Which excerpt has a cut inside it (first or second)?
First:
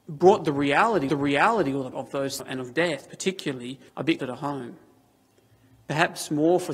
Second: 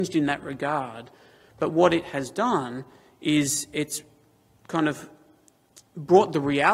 first